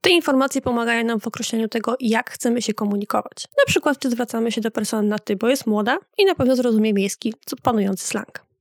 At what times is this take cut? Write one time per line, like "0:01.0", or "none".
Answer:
0:03.5